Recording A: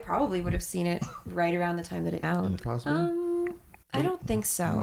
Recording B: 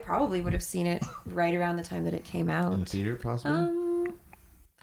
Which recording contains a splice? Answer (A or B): A